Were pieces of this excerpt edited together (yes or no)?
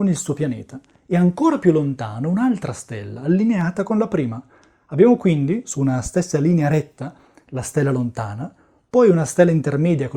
no